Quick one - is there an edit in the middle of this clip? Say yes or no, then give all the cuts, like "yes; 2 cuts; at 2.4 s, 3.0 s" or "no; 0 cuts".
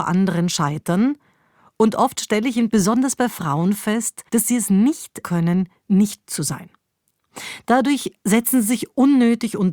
yes; 4 cuts; at 2.7 s, 4.3 s, 5.2 s, 6.2 s